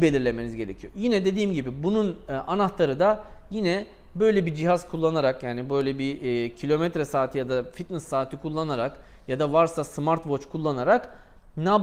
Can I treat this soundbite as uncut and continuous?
yes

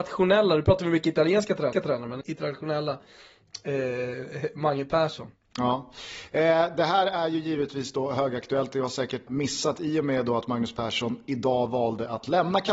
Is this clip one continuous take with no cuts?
no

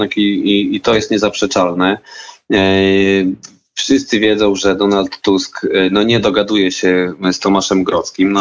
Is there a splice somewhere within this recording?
no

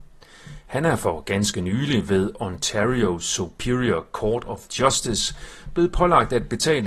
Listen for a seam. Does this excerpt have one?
no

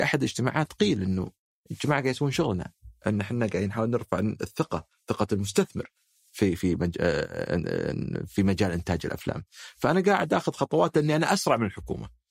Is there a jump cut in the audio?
no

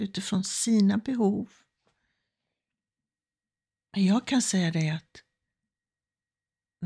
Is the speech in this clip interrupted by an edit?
no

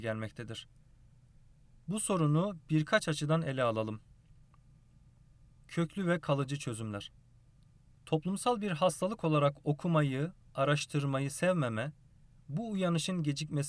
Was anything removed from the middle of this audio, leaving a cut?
no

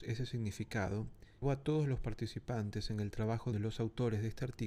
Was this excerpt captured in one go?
no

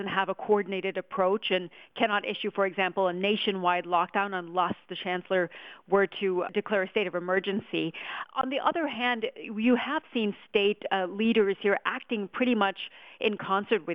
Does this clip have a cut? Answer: no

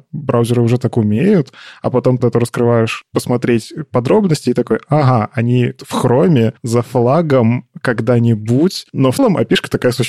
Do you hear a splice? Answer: yes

